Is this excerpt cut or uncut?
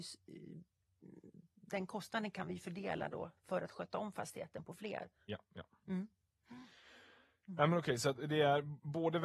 uncut